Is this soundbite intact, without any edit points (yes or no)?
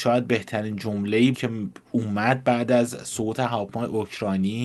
no